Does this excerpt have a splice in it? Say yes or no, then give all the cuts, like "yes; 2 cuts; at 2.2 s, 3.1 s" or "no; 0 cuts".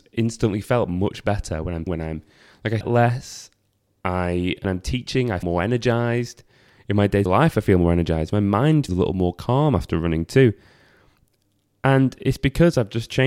yes; 6 cuts; at 1.9 s, 2.8 s, 4.6 s, 5.4 s, 7.3 s, 8.9 s